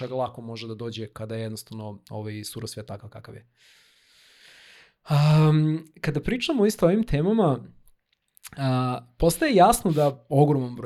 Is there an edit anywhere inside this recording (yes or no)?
no